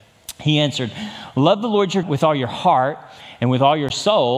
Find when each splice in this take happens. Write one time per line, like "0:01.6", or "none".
0:02.0